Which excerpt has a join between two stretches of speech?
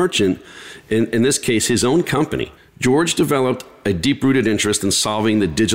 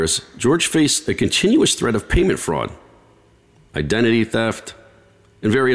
first; 1 cut; at 2.6 s

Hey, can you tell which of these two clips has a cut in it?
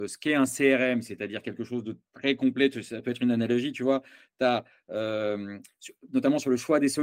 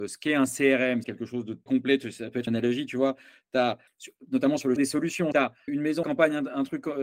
second; 8 cuts; at 1.0 s, 1.7 s, 2.5 s, 3.9 s, 4.8 s, 5.3 s, 5.7 s, 6.0 s

